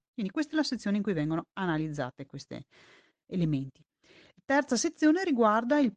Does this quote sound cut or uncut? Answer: uncut